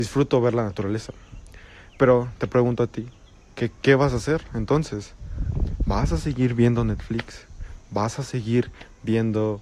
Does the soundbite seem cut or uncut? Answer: uncut